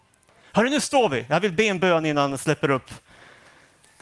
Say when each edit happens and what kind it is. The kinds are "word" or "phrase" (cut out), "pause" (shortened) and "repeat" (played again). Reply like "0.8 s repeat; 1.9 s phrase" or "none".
none